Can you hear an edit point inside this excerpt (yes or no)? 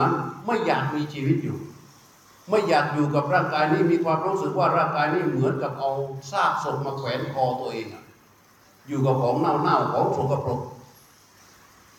no